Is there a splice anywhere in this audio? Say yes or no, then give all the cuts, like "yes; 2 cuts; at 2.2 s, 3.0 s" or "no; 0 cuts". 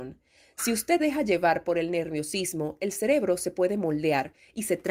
yes; 1 cut; at 1.0 s